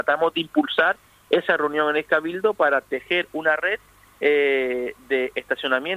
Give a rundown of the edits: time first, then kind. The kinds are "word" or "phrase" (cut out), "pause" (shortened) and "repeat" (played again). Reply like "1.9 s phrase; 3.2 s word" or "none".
none